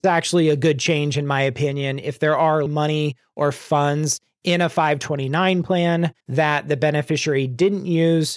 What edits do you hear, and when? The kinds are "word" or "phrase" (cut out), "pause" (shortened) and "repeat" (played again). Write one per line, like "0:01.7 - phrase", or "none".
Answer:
0:02.7 - word
0:06.2 - pause